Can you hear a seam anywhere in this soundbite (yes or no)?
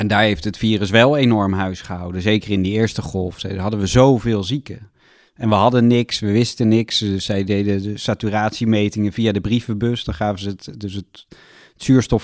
no